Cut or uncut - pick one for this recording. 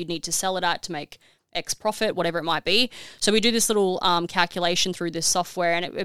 uncut